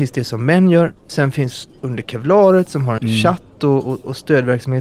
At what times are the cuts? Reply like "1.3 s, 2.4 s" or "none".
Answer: 3.0 s